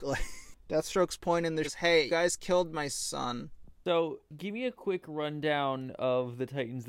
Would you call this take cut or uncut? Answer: cut